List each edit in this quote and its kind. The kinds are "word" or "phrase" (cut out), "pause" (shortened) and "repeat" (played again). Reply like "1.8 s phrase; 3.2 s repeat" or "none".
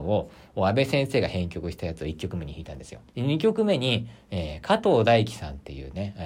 3.1 s pause